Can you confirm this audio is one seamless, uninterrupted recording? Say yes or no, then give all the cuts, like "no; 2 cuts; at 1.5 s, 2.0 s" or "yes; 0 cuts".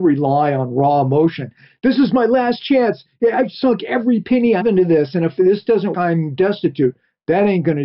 no; 2 cuts; at 4.6 s, 5.9 s